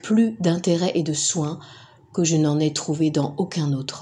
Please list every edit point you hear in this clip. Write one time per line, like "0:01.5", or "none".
none